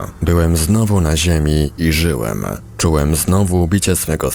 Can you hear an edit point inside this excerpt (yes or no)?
no